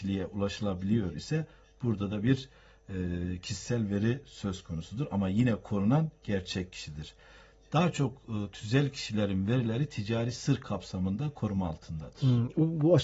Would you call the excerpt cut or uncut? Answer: uncut